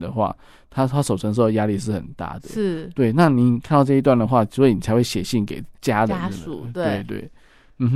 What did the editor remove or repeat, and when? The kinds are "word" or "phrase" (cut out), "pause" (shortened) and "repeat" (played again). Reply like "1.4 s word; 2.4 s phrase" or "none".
5.8 s pause